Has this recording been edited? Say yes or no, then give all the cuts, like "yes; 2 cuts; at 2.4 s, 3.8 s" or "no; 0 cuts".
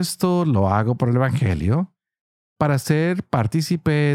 no; 0 cuts